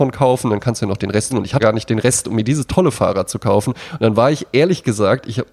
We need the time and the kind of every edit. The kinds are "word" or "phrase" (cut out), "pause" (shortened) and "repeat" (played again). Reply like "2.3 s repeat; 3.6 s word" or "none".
1.3 s word; 1.6 s word